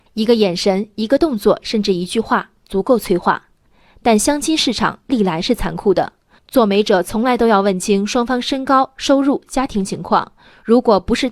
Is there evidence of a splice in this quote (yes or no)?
no